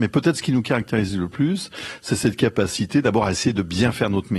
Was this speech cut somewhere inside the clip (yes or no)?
no